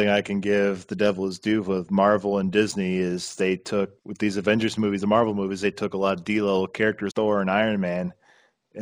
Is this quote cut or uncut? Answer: cut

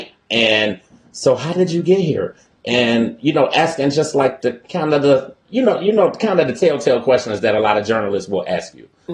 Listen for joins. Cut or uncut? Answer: uncut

